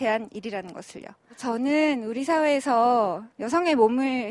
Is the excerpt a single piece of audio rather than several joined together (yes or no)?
no